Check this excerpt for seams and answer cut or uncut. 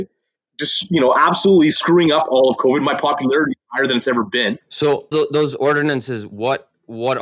cut